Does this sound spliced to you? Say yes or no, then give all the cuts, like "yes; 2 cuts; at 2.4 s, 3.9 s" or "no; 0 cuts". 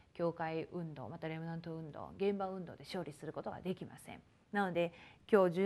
no; 0 cuts